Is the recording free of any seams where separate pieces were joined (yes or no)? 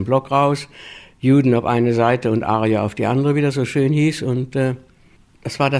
yes